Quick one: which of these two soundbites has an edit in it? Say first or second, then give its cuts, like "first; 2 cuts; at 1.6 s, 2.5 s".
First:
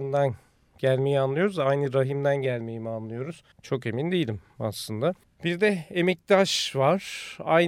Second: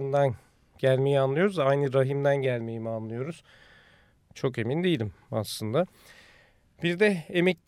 first; 2 cuts; at 3.5 s, 5.2 s